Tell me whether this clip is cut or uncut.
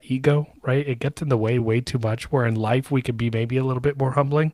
uncut